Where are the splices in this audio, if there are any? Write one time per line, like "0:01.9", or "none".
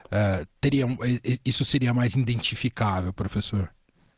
none